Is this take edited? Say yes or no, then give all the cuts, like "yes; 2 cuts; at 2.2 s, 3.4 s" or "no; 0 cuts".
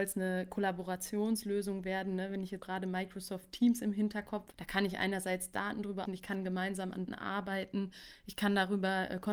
yes; 4 cuts; at 2.6 s, 4.5 s, 6.1 s, 7.1 s